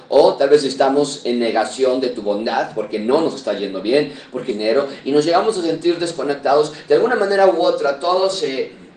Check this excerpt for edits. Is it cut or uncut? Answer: cut